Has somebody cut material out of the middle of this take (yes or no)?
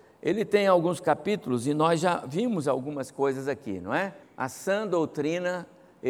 yes